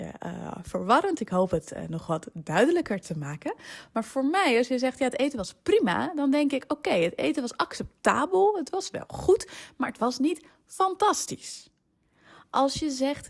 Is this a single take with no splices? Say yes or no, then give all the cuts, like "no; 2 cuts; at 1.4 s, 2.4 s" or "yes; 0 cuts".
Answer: yes; 0 cuts